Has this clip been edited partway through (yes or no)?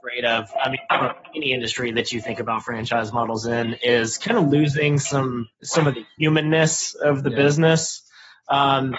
yes